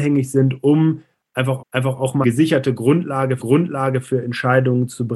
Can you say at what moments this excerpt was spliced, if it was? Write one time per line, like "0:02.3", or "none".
0:01.6
0:02.2
0:03.4